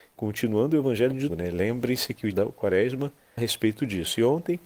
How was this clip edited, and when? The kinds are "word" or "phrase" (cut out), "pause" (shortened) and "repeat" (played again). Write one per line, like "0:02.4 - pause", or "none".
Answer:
0:01.3 - word
0:02.3 - word
0:03.4 - word

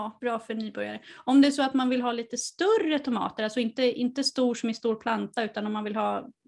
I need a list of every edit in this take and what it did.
none

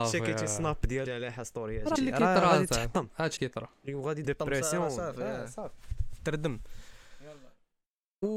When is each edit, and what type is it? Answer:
0:01.1 - word
0:02.0 - word
0:03.4 - word
0:04.2 - word

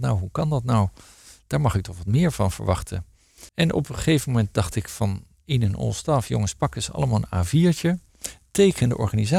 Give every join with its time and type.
0:03.5 - pause

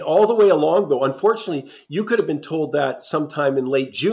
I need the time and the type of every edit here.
none

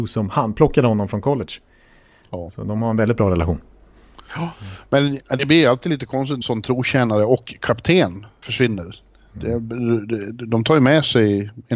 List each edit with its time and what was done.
0:06.4 - word
0:08.4 - word

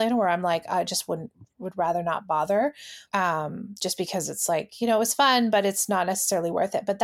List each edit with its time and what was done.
0:03.1 - pause

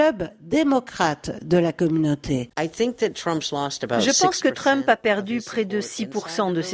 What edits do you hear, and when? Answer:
none

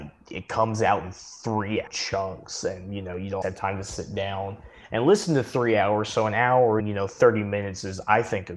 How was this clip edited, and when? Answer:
0:01.9 - word
0:03.4 - word
0:06.8 - word

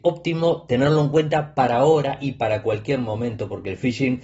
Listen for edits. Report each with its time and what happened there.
none

